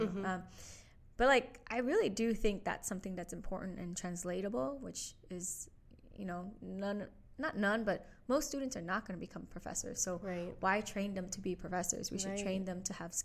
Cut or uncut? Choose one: uncut